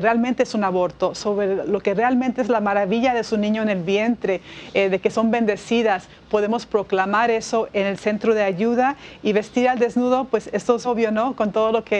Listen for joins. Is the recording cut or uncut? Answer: cut